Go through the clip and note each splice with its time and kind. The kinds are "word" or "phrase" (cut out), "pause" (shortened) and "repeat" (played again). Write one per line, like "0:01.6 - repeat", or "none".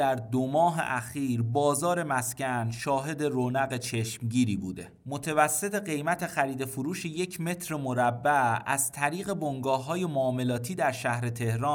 none